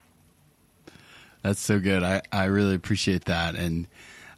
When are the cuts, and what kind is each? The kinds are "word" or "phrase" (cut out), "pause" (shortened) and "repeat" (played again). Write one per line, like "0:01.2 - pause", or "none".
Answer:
none